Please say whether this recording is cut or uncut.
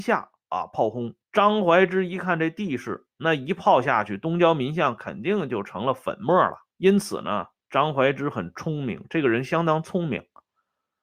cut